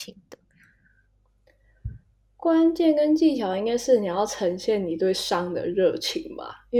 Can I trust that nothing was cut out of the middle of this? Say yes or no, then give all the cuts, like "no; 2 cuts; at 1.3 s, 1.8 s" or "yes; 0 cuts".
yes; 0 cuts